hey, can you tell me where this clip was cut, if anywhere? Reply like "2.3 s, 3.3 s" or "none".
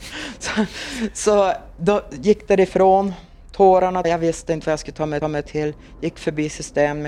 4.0 s, 5.2 s

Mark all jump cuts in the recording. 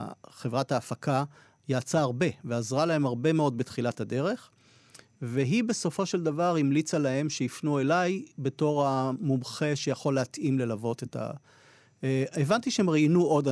none

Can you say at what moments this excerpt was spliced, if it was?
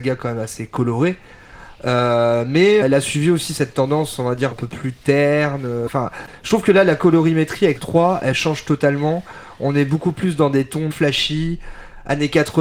2.8 s, 4.5 s, 7.8 s, 10.9 s

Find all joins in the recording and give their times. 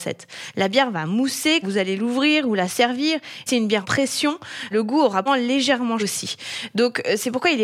1.6 s, 3.5 s, 3.8 s, 4.7 s, 5.3 s, 6.0 s

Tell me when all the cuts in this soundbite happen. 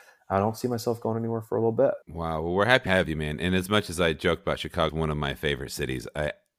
2.0 s, 2.9 s, 4.9 s

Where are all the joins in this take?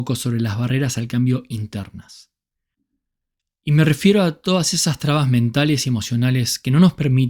none

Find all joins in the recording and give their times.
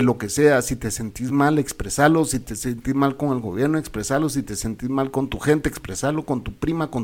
none

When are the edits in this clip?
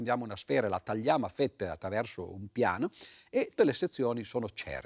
3.6 s

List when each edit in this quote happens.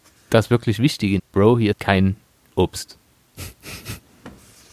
1.2 s, 1.7 s

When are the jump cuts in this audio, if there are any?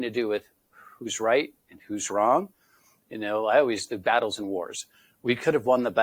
none

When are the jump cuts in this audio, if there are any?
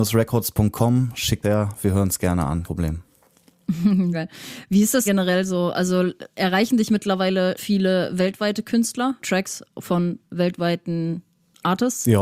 1.4 s, 2.6 s, 4.1 s, 5.1 s, 7.6 s, 9.2 s

